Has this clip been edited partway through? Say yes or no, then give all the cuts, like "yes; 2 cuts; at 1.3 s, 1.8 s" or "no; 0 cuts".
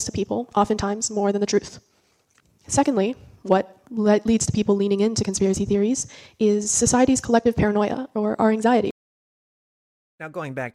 no; 0 cuts